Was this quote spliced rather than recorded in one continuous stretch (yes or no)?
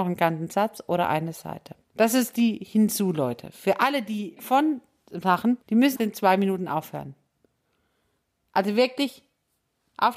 yes